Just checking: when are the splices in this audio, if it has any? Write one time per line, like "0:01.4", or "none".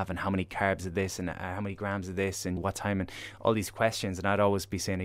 0:02.6